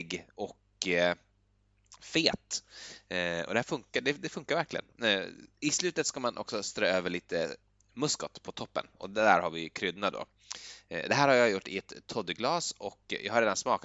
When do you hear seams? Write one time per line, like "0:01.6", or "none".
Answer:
none